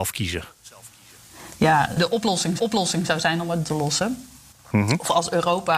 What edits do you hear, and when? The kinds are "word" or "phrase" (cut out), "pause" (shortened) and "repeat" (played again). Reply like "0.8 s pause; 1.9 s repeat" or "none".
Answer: 2.6 s repeat; 3.6 s phrase